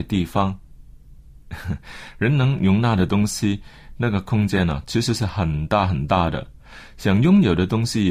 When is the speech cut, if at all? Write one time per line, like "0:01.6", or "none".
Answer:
0:01.2